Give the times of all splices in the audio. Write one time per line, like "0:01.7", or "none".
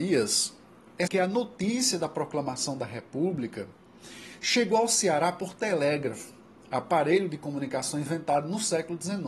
0:01.1